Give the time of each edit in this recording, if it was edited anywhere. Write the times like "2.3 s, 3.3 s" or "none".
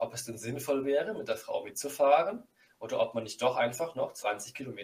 none